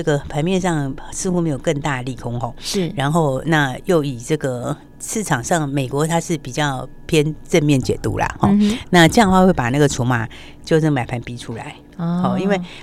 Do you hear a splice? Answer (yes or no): yes